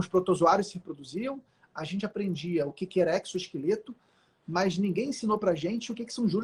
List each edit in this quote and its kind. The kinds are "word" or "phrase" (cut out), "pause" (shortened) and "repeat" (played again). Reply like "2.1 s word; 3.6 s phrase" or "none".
none